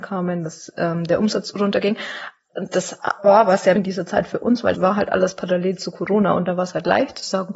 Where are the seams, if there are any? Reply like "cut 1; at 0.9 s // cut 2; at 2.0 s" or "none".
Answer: cut 1; at 3.8 s // cut 2; at 4.7 s